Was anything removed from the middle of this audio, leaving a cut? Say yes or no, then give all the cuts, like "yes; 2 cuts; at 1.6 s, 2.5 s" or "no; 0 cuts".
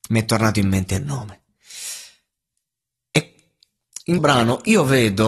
yes; 1 cut; at 4.2 s